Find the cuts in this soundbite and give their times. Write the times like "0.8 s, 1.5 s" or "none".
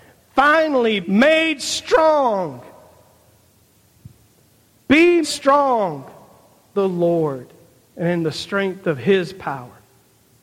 1.0 s, 5.2 s, 6.7 s